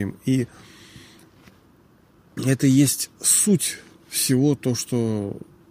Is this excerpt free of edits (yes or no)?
yes